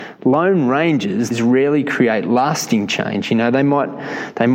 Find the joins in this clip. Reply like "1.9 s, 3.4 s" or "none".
1.3 s

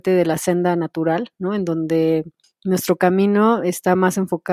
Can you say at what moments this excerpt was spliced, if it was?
2.4 s

